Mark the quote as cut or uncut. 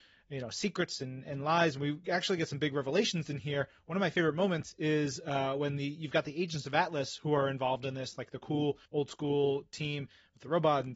cut